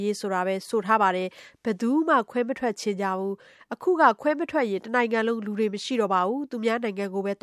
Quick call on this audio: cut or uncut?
uncut